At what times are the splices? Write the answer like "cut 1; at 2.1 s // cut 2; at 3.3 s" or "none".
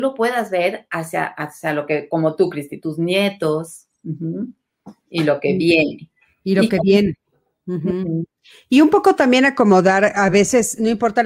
none